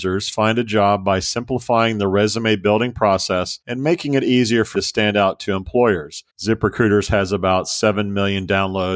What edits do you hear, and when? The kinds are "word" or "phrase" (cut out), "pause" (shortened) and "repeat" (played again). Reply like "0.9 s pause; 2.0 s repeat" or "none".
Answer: 3.6 s pause; 4.7 s word; 6.3 s pause